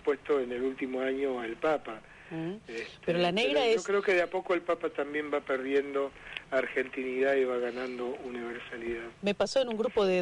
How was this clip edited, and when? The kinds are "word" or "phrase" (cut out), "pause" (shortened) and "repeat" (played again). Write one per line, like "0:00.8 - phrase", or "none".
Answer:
none